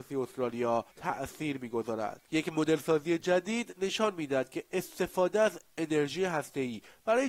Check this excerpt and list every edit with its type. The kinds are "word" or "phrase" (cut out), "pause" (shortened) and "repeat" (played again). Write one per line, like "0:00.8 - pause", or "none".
0:00.9 - pause
0:02.2 - pause